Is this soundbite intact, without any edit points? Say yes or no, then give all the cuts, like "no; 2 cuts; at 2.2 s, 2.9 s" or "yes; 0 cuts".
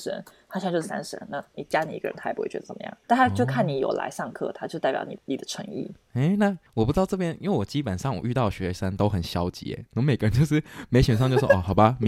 no; 4 cuts; at 3.0 s, 5.2 s, 6.0 s, 6.7 s